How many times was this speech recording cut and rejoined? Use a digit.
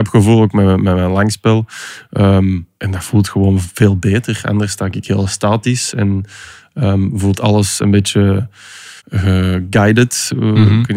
2